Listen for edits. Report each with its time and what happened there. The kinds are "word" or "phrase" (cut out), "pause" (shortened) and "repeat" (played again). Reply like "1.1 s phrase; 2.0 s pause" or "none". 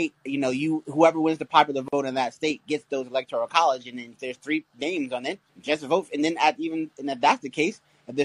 5.5 s pause